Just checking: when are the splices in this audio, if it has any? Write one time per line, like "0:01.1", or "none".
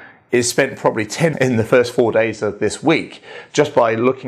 0:01.3

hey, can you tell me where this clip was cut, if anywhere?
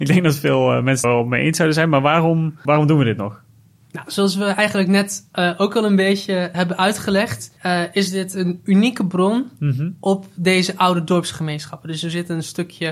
0:01.0
0:06.5
0:07.6

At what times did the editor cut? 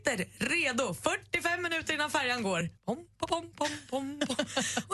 0:02.8

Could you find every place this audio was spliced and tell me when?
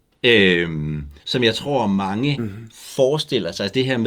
0:01.2

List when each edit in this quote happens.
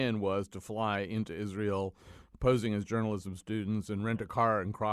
none

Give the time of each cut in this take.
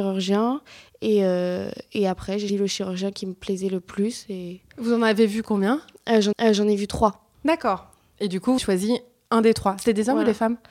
0:02.5
0:06.3
0:07.3
0:08.6

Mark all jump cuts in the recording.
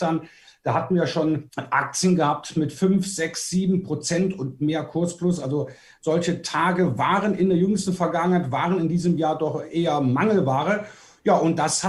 none

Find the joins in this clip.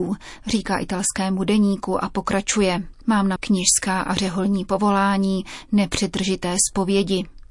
0:03.4

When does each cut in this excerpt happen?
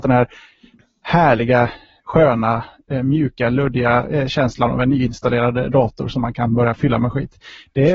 none

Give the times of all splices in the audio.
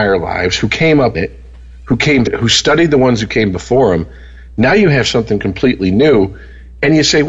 0:01.1
0:02.3

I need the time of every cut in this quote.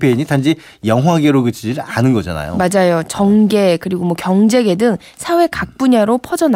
none

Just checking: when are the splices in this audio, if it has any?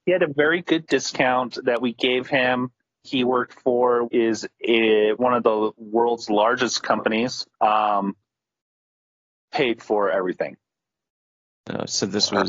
0:03.0
0:04.0
0:05.2
0:07.5

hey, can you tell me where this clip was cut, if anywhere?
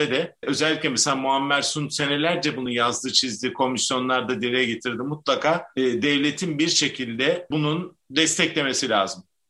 none

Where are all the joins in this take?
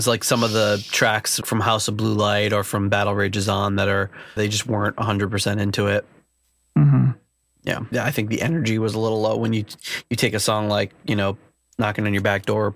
0:01.4
0:04.4
0:07.9

